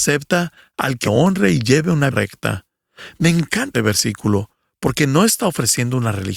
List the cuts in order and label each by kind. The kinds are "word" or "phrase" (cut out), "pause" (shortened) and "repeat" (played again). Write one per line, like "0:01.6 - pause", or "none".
0:01.0 - word
0:02.1 - word
0:03.7 - word